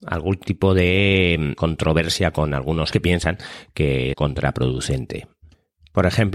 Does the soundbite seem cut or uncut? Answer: cut